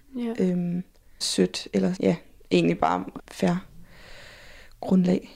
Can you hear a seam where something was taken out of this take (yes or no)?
yes